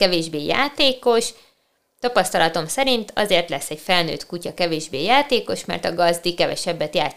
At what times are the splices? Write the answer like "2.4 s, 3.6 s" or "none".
none